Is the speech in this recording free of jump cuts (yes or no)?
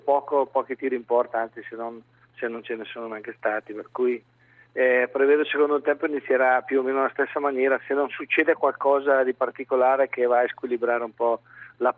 yes